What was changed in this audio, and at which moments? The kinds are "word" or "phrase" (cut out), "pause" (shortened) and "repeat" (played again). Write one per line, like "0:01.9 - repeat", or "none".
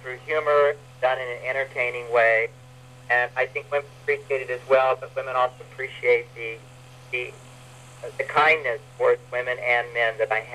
none